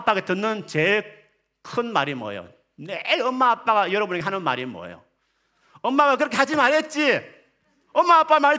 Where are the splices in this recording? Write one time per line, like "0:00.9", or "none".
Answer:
none